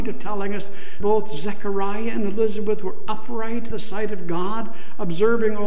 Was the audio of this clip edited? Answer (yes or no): yes